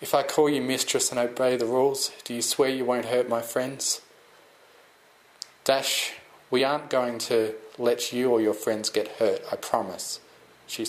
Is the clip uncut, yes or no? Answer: yes